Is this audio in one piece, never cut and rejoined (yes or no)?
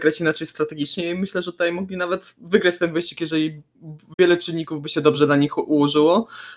yes